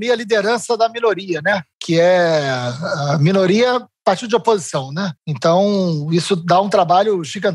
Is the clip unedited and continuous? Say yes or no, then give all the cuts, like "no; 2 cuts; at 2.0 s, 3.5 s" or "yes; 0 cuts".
no; 2 cuts; at 1.7 s, 5.2 s